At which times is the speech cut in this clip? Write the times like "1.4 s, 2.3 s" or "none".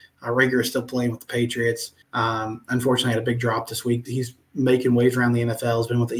2.0 s, 4.0 s